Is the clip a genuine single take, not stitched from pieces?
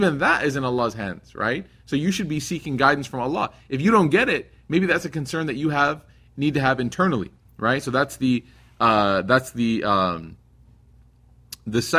yes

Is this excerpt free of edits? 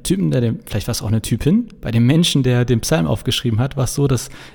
yes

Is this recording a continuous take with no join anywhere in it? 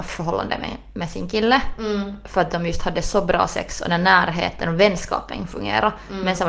yes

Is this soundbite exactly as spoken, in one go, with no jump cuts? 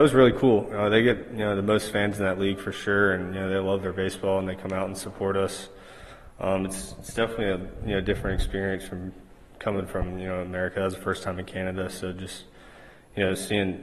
yes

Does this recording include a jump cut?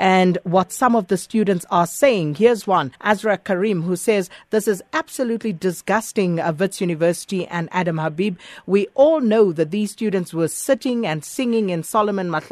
yes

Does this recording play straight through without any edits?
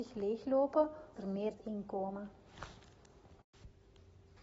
no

